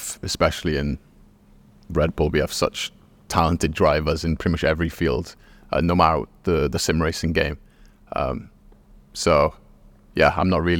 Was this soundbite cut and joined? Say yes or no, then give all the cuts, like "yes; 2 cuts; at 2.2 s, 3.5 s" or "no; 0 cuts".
no; 0 cuts